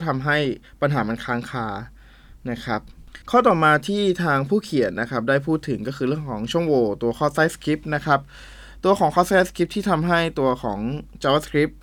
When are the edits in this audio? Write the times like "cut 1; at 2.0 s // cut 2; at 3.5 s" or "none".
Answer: cut 1; at 3.2 s